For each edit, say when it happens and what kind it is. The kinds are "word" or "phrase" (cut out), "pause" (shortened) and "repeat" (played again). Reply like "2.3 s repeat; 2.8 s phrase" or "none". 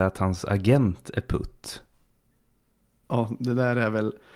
none

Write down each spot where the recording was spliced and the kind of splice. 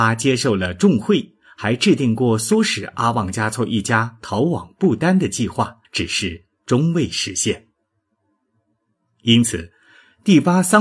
5.8 s pause

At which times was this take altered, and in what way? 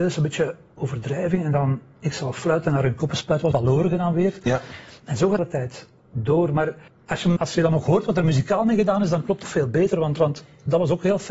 3.5 s word; 5.4 s phrase; 6.9 s pause; 7.4 s word; 9.4 s word

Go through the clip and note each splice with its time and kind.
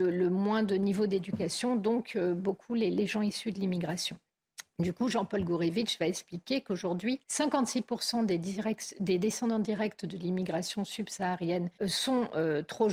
7.2 s pause; 11.8 s pause

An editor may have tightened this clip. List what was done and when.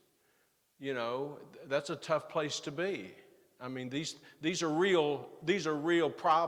none

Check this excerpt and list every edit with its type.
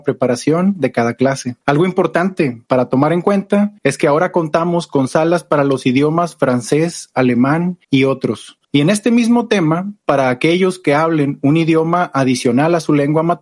1.6 s pause; 2.7 s pause; 3.8 s pause; 7.8 s pause; 8.6 s pause

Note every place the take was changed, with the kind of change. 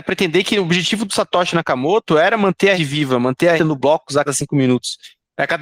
2.8 s word; 3.6 s word; 4.3 s word

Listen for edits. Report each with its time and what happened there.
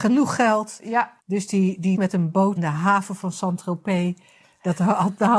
1.2 s pause; 1.9 s word; 2.6 s word

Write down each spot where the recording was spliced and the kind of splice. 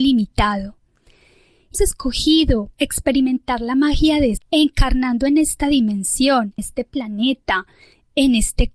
1.7 s word; 2.7 s pause; 4.4 s word; 6.6 s word

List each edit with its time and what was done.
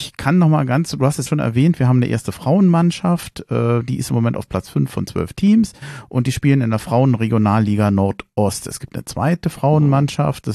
1.3 s word

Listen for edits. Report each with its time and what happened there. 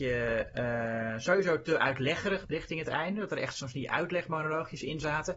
2.4 s word

